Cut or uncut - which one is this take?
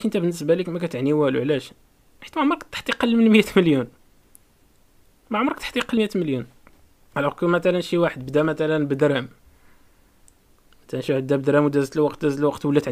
cut